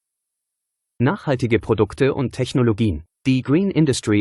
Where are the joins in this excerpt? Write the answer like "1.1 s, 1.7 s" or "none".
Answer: 3.2 s